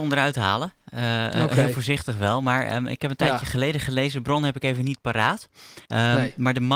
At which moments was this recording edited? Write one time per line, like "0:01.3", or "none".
0:05.8